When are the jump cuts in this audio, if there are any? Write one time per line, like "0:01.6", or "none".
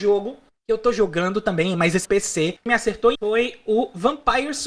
0:02.0
0:02.7
0:03.1